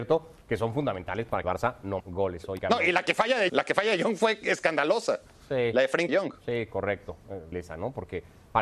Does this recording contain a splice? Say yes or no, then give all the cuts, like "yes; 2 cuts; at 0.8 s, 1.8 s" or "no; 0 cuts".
yes; 6 cuts; at 1.4 s, 2.0 s, 2.6 s, 3.5 s, 6.1 s, 7.5 s